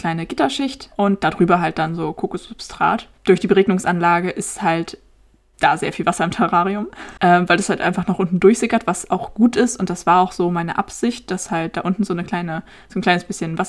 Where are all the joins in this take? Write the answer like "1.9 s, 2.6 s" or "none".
none